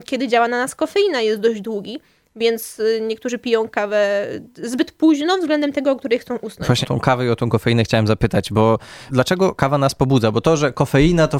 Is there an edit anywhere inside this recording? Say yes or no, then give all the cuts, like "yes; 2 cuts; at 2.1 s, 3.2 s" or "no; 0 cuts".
yes; 2 cuts; at 6.8 s, 9.1 s